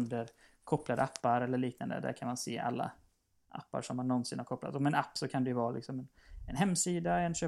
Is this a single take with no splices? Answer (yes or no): yes